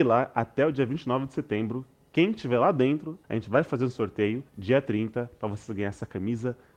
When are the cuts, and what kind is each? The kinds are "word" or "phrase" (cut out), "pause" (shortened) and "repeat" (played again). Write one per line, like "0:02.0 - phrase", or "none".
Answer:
0:03.2 - pause
0:04.5 - pause